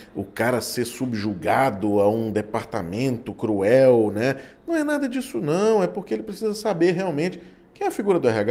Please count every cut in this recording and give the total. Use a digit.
0